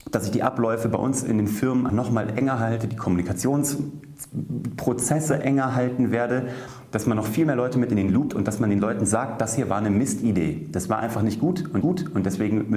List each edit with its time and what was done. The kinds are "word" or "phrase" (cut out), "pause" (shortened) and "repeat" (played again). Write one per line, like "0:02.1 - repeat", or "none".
0:01.9 - word
0:08.3 - word
0:11.8 - repeat